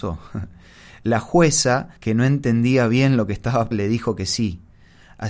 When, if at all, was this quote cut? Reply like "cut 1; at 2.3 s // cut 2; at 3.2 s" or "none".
cut 1; at 2.0 s // cut 2; at 3.7 s